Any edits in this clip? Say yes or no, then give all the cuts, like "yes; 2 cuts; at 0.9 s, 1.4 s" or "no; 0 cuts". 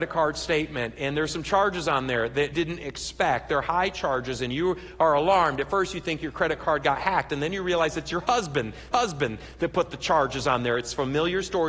yes; 2 cuts; at 2.5 s, 8.9 s